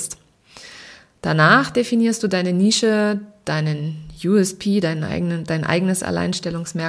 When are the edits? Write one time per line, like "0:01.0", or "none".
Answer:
none